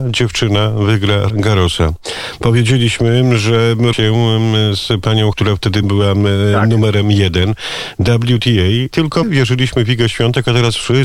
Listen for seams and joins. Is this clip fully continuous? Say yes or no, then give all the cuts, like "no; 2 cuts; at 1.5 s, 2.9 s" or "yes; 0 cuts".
no; 6 cuts; at 1.3 s, 3.9 s, 5.3 s, 5.8 s, 8.9 s, 9.2 s